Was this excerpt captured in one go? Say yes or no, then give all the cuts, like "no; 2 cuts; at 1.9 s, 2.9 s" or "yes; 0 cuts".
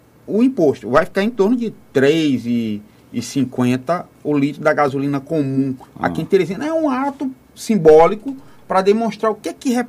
yes; 0 cuts